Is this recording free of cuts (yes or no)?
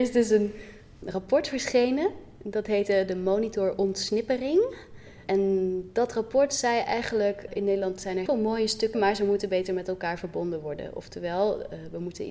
no